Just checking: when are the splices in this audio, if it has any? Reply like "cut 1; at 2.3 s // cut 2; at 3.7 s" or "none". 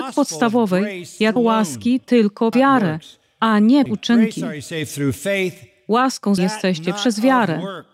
cut 1; at 1.4 s // cut 2; at 2.5 s // cut 3; at 3.9 s // cut 4; at 6.4 s